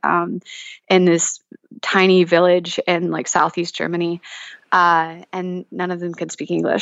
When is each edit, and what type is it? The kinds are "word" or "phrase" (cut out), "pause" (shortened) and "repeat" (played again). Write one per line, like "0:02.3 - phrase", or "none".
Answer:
none